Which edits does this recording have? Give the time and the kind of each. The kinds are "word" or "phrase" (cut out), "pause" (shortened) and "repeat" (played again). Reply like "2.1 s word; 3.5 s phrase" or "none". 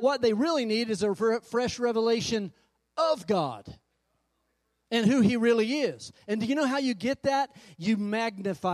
none